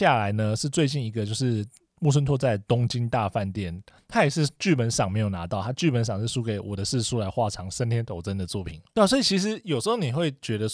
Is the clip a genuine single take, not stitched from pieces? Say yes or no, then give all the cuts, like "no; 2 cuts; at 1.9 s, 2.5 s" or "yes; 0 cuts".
yes; 0 cuts